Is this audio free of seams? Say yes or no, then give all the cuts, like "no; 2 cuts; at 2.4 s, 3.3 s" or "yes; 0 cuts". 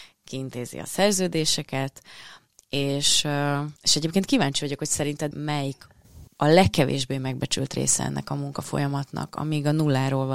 no; 2 cuts; at 3.8 s, 6.3 s